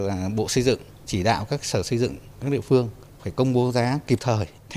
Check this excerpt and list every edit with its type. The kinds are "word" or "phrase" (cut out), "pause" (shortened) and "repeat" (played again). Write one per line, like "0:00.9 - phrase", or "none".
none